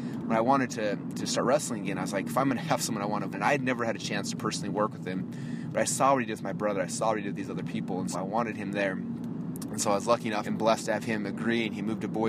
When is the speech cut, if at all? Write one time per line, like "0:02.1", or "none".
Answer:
0:03.3
0:08.1
0:10.4